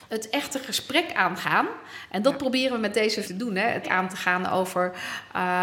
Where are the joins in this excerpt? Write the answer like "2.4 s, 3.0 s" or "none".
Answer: 3.2 s, 3.8 s